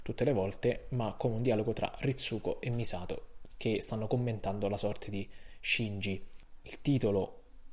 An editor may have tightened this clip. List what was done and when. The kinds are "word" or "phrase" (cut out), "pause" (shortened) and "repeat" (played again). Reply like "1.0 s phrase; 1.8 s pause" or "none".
none